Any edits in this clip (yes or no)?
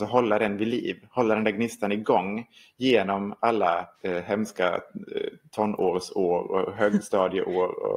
yes